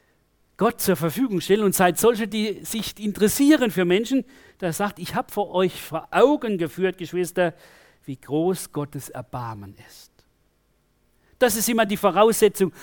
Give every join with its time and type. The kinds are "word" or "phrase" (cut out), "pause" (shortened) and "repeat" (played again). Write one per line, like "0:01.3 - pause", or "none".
none